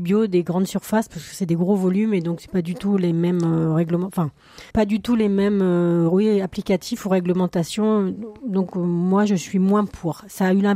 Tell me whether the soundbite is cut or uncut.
cut